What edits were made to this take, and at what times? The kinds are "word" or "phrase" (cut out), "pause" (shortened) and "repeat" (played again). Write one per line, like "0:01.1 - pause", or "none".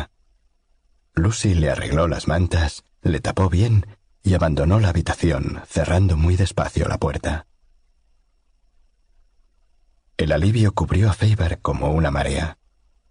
none